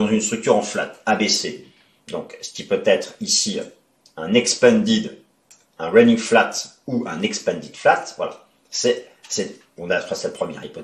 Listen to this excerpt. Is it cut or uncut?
uncut